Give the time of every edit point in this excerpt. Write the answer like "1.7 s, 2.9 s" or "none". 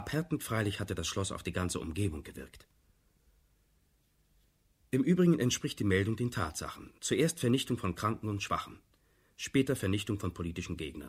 7.0 s